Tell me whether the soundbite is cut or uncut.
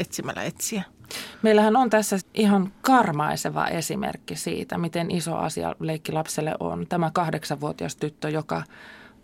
cut